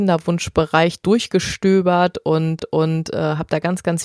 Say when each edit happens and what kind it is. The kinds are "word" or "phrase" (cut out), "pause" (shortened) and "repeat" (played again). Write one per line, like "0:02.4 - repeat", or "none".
0:02.6 - repeat